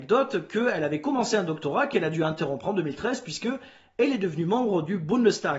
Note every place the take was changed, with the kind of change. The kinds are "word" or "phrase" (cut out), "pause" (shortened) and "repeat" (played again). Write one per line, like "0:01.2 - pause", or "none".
none